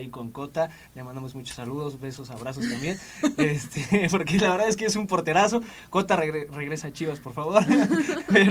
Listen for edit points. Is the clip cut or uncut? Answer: uncut